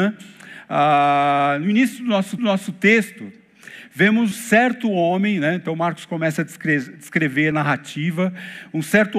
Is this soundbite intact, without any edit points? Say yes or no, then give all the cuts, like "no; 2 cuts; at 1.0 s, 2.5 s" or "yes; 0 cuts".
no; 3 cuts; at 2.4 s, 4.3 s, 7.5 s